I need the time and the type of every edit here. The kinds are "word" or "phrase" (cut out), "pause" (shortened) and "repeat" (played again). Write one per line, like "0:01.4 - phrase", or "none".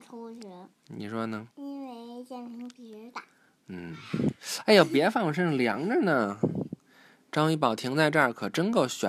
0:01.5 - pause